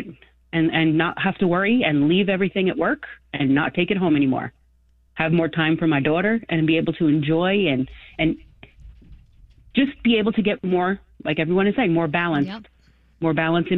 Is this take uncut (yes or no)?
yes